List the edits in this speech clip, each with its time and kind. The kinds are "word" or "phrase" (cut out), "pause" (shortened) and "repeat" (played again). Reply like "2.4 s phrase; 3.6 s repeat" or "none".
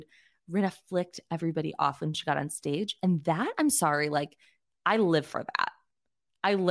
none